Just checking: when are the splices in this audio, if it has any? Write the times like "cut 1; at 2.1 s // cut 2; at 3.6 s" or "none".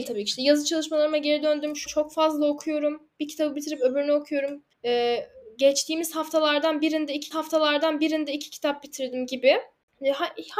cut 1; at 1.9 s // cut 2; at 4.7 s // cut 3; at 7.3 s